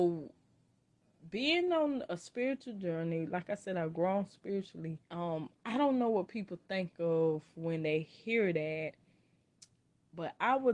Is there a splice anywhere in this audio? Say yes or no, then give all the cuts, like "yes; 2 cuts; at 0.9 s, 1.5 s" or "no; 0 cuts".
yes; 1 cut; at 5.0 s